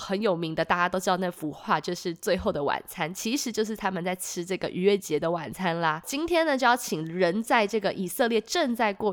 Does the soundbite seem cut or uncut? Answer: uncut